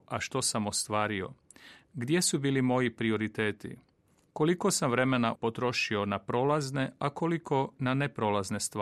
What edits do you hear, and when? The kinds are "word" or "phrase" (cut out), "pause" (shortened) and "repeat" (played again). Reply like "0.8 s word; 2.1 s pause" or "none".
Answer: 5.4 s word